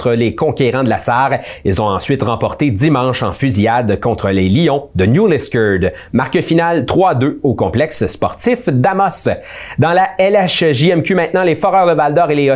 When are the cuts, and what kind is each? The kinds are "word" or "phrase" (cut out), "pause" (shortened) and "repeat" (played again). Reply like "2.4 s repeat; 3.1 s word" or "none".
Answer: none